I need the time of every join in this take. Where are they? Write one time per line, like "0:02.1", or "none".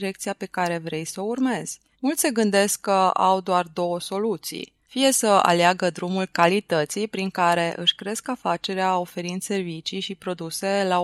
0:01.9
0:04.8